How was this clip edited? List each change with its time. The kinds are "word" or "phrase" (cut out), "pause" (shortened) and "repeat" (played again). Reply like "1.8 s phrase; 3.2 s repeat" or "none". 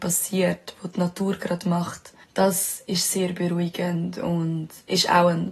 2.2 s pause